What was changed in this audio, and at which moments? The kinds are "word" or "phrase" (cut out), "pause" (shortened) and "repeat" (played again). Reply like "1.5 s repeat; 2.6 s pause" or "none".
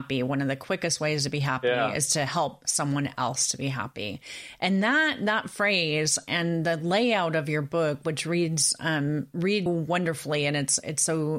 9.7 s word